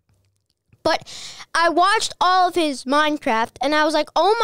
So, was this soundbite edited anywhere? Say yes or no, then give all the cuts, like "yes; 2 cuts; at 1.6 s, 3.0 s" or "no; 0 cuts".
no; 0 cuts